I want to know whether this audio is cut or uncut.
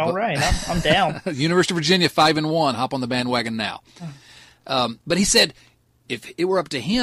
uncut